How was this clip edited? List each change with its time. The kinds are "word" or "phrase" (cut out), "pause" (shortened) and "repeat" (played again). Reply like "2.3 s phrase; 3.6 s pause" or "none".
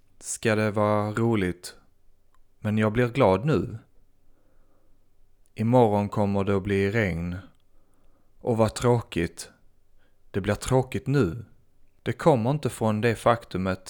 none